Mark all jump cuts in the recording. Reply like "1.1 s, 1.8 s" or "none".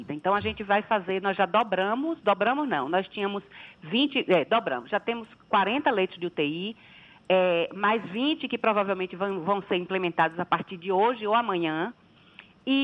none